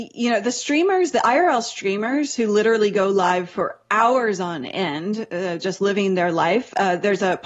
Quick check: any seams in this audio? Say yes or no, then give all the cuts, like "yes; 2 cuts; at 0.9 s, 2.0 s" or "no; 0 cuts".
no; 0 cuts